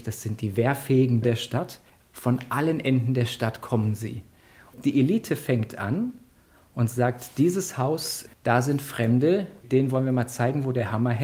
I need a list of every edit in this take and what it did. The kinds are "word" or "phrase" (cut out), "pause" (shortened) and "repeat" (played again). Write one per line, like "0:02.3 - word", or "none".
0:01.2 - word
0:01.9 - pause
0:08.3 - pause